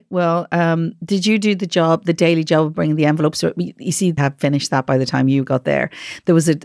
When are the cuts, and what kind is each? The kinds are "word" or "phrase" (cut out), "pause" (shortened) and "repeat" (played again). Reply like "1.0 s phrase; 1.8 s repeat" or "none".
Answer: 4.2 s word